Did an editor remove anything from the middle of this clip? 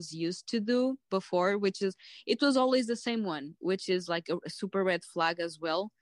no; 0 cuts

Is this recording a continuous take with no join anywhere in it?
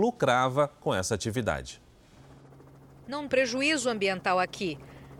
no; 1 cut; at 3.3 s

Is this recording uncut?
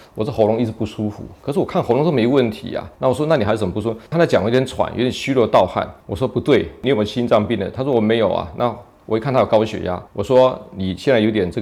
no; 4 cuts; at 2.9 s, 4.1 s, 6.0 s, 10.1 s

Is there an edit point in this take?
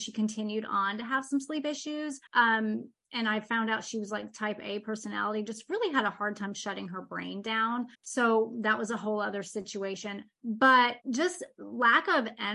yes; 3 cuts; at 2.3 s, 7.9 s, 11.0 s

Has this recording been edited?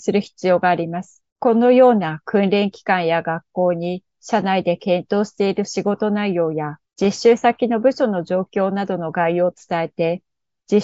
yes; 3 cuts; at 1.3 s, 4.1 s, 6.8 s

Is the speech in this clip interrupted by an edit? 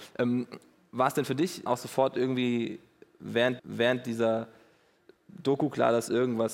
yes; 2 cuts; at 1.7 s, 3.6 s

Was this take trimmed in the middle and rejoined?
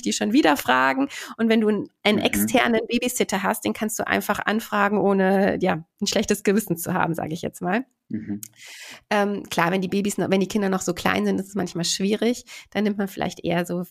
no; 0 cuts

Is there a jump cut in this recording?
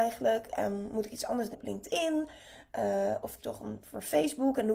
yes; 2 cuts; at 1.5 s, 3.4 s

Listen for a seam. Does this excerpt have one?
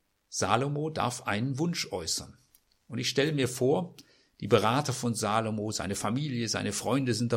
no; 0 cuts

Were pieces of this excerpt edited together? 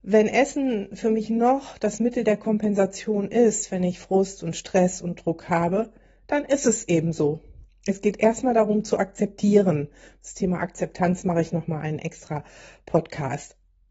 no; 0 cuts

